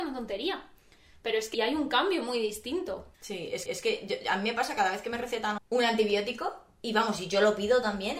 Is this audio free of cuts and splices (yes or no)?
no